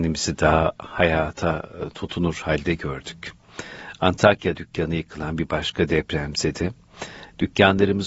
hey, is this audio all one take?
no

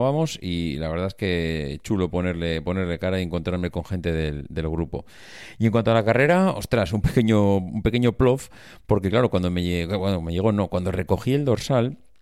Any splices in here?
no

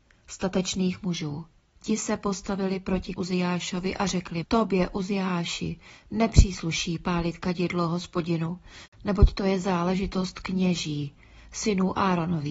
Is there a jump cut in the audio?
yes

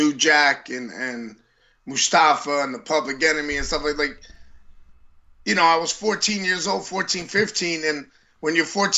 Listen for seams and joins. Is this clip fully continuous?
yes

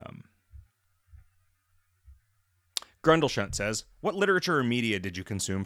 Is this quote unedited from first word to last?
yes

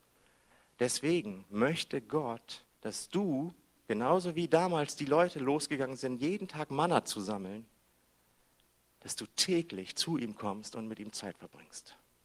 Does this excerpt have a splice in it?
yes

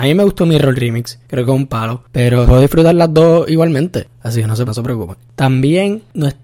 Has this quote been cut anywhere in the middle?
yes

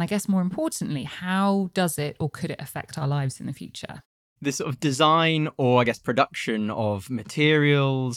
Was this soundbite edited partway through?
no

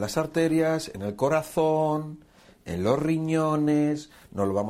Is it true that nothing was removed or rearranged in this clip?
yes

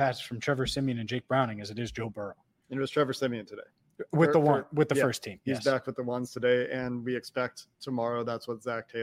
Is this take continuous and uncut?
yes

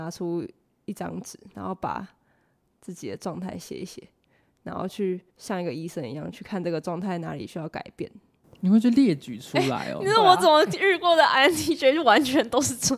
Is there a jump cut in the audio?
yes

